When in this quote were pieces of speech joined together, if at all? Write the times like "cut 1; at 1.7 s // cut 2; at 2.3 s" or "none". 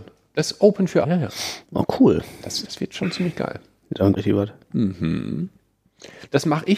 cut 1; at 1.0 s // cut 2; at 1.6 s // cut 3; at 2.6 s // cut 4; at 4.2 s